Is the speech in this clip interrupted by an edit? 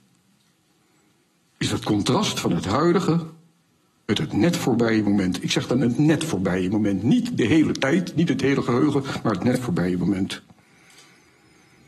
no; 0 cuts

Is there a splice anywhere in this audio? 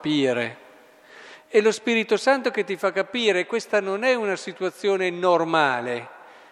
no; 0 cuts

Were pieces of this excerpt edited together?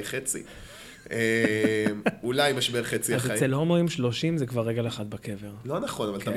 no; 0 cuts

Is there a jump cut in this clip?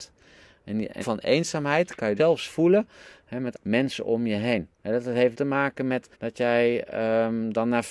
yes; 6 cuts; at 1.0 s, 2.2 s, 3.5 s, 4.7 s, 5.3 s, 6.1 s

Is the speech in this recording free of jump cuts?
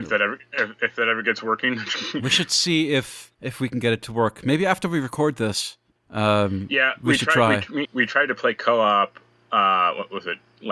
no; 3 cuts; at 3.3 s, 6.0 s, 7.8 s

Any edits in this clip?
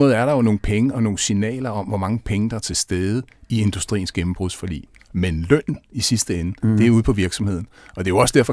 no; 0 cuts

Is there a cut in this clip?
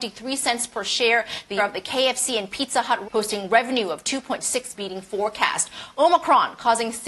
yes; 3 cuts; at 1.6 s, 3.0 s, 4.7 s

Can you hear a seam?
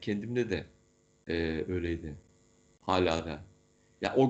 no; 0 cuts

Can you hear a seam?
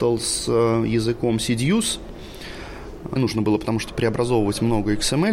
yes; 1 cut; at 3.2 s

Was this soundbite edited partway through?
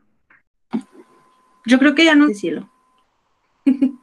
yes; 1 cut; at 2.3 s

